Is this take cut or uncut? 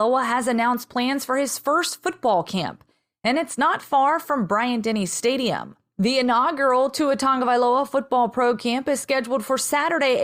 uncut